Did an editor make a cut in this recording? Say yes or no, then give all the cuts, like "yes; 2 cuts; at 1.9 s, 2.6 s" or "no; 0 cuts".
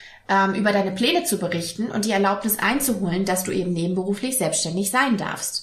no; 0 cuts